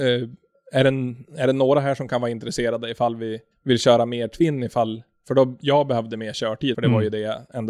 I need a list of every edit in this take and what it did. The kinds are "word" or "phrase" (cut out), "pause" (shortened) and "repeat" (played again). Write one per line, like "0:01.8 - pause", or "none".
0:03.5 - pause
0:06.7 - word